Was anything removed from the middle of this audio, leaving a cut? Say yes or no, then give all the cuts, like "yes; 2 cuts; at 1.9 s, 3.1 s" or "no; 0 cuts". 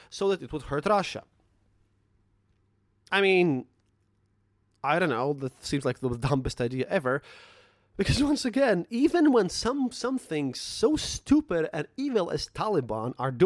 no; 0 cuts